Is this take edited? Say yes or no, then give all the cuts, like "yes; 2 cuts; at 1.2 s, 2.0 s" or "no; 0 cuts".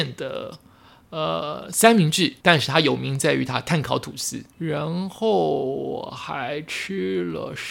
yes; 2 cuts; at 2.4 s, 4.5 s